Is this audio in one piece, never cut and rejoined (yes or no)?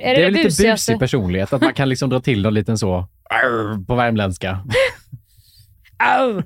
yes